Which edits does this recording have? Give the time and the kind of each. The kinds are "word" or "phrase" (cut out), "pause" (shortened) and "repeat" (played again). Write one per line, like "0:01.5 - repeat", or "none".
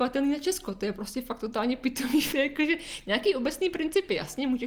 0:02.3 - word